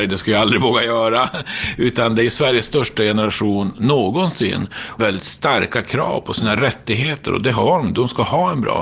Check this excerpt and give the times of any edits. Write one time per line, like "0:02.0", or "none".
0:05.0